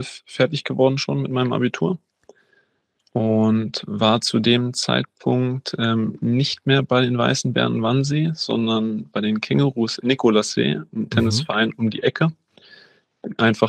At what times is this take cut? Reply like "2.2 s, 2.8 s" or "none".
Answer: none